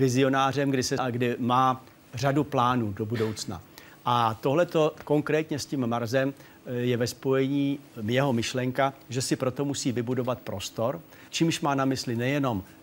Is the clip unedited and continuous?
no; 2 cuts; at 1.0 s, 11.3 s

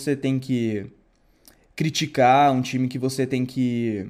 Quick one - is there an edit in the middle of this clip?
no; 0 cuts

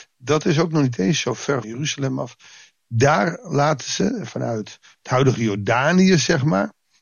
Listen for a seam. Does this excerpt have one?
yes; 1 cut; at 1.6 s

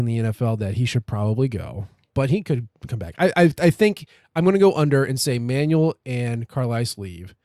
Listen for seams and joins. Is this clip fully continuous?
yes; 0 cuts

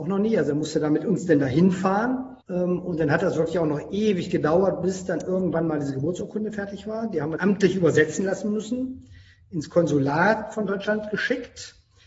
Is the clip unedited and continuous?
no; 2 cuts; at 2.4 s, 7.4 s

